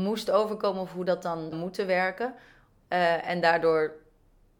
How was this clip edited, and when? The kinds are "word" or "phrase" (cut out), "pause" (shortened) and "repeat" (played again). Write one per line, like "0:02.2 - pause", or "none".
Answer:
0:01.5 - word